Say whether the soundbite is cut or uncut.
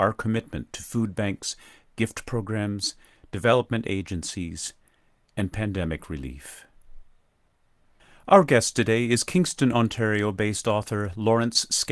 uncut